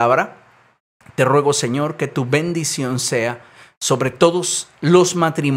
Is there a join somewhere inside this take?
no; 0 cuts

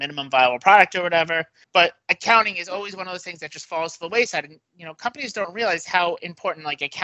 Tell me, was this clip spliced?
no; 0 cuts

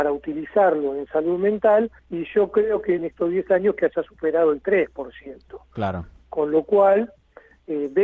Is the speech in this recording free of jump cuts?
no; 2 cuts; at 2.0 s, 3.0 s

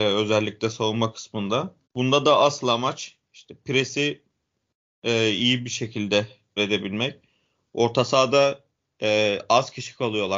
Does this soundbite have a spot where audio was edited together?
yes; 2 cuts; at 1.8 s, 6.6 s

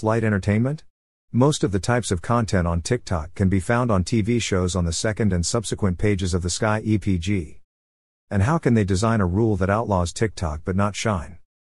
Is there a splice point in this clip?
no; 0 cuts

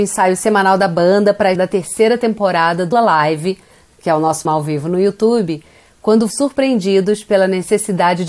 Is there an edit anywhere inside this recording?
yes; 4 cuts; at 1.6 s, 2.9 s, 4.5 s, 6.3 s

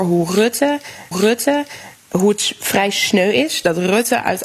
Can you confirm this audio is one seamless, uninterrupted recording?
no; 1 cut; at 1.1 s

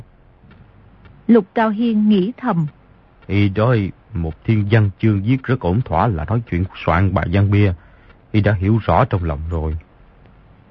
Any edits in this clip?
no; 0 cuts

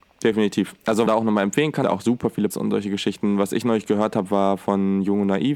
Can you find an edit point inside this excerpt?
yes; 3 cuts; at 1.1 s, 1.8 s, 2.5 s

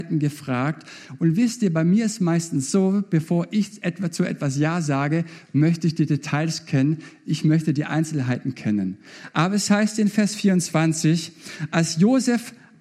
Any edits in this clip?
no; 0 cuts

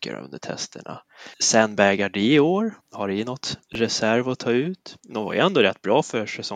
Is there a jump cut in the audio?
yes; 4 cuts; at 1.3 s, 2.8 s, 3.6 s, 5.0 s

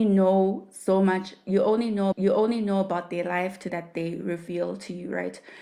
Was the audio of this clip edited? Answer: yes; 2 cuts; at 2.1 s, 3.7 s

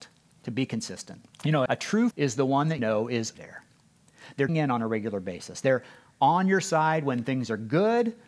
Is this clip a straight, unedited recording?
no; 6 cuts; at 1.3 s, 1.7 s, 2.1 s, 2.8 s, 3.3 s, 4.5 s

